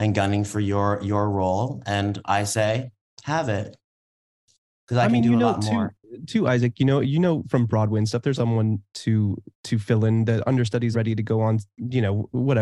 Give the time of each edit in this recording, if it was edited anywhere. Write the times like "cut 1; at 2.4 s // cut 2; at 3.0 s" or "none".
cut 1; at 8.4 s // cut 2; at 9.5 s // cut 3; at 10.9 s